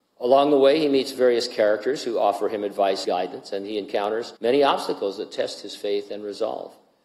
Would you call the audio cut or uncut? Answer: cut